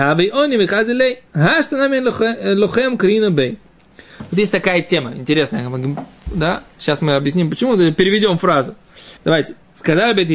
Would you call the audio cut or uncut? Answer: cut